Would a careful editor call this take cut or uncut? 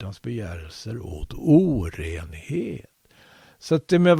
uncut